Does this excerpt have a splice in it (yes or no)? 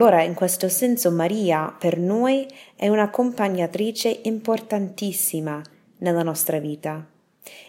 no